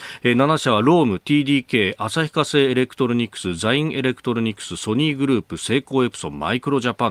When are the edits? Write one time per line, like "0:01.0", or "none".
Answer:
none